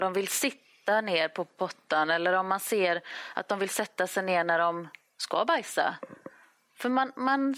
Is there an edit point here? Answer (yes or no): no